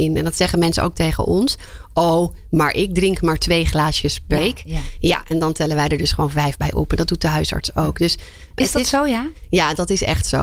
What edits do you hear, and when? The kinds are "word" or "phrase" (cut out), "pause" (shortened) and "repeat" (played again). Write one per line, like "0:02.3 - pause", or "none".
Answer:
0:04.4 - word
0:08.6 - word